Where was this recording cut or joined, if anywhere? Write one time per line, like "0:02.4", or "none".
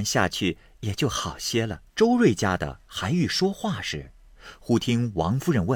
0:01.9